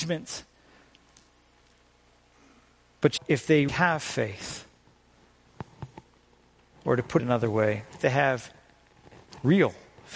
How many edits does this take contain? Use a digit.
4